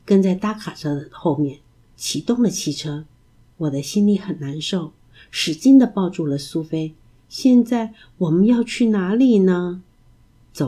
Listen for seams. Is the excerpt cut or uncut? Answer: uncut